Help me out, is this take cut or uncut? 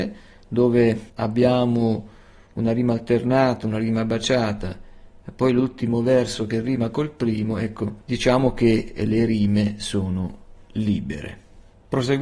cut